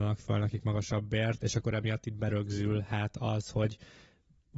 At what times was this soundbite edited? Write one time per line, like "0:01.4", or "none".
none